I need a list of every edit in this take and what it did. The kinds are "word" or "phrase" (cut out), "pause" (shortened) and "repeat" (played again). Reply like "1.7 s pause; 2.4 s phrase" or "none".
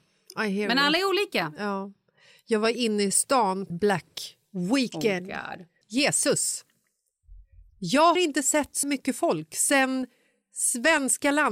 3.7 s word; 5.8 s word; 8.2 s word; 8.8 s word